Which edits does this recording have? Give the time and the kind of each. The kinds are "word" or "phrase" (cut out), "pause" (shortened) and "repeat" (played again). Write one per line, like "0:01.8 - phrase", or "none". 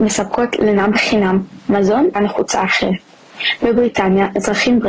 0:02.2 - word

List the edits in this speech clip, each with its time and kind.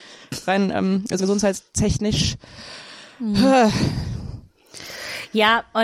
0:01.2 - word

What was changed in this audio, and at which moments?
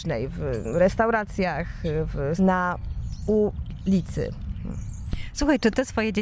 0:02.4 - word

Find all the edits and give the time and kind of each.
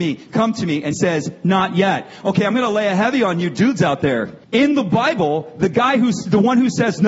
0:00.9 - word
0:04.4 - pause

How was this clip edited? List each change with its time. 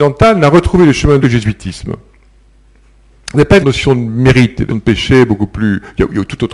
0:01.2 - phrase
0:03.6 - word
0:04.7 - word

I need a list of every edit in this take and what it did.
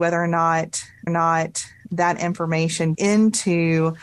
0:01.1 - repeat
0:02.9 - word

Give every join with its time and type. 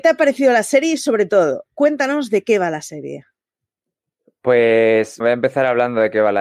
0:05.2 - word

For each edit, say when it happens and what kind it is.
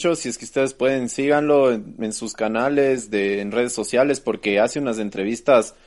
none

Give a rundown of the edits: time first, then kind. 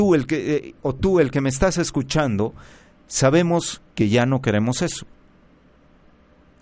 0:03.9 - pause

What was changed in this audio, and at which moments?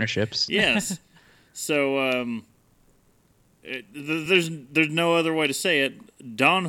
none

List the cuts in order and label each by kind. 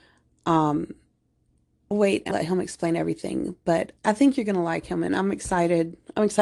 0:01.9 - word
0:02.3 - word
0:04.0 - word

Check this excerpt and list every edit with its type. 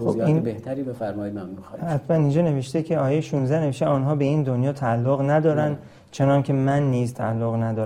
none

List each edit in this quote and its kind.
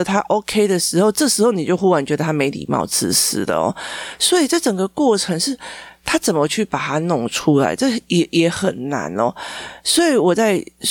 none

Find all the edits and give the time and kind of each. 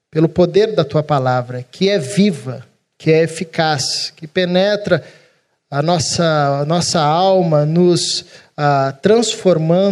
none

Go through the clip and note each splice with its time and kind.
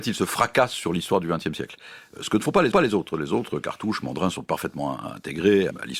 0:02.7 - repeat

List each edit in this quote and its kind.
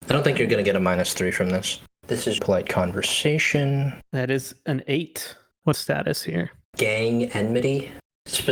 0:02.4 - phrase
0:05.7 - phrase

